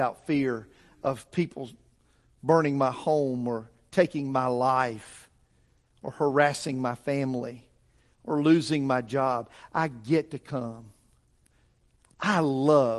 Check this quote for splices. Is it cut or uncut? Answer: uncut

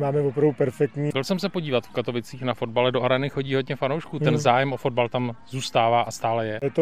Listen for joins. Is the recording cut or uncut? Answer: uncut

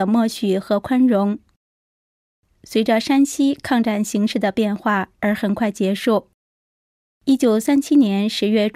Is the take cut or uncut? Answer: uncut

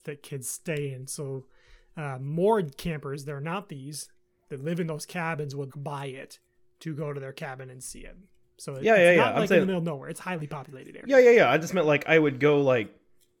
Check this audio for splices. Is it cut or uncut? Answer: cut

